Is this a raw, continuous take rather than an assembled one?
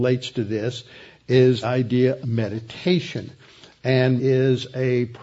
no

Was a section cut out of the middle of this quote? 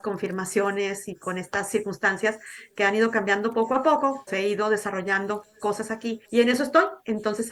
yes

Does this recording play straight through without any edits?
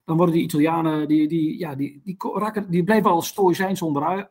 no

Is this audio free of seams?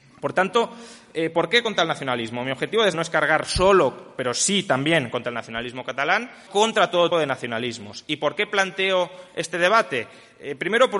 no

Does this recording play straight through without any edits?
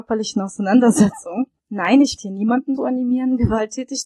no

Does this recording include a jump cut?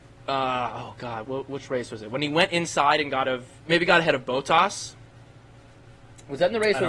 yes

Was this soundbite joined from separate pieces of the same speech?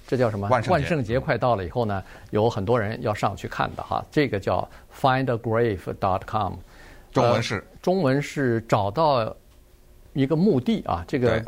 no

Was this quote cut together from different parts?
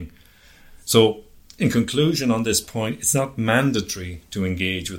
no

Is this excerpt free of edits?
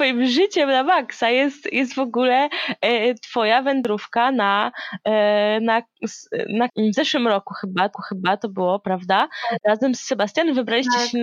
no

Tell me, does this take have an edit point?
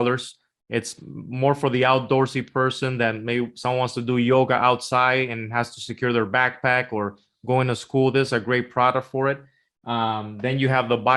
no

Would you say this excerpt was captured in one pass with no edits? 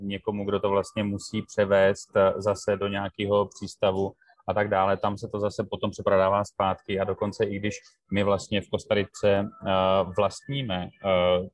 yes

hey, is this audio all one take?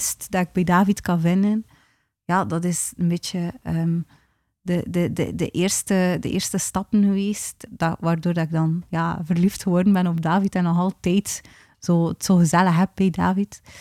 no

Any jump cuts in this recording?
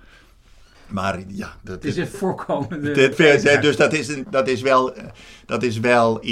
yes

